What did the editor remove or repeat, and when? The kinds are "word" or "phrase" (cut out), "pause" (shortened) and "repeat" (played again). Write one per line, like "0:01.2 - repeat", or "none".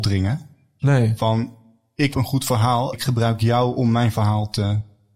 0:02.1 - word
0:02.9 - word